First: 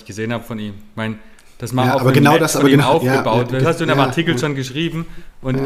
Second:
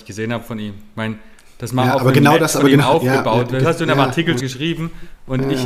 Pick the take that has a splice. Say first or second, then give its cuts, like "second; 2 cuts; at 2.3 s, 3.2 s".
second; 1 cut; at 4.4 s